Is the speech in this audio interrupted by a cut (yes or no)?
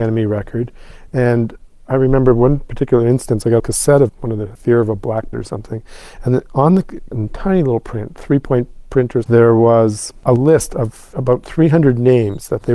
yes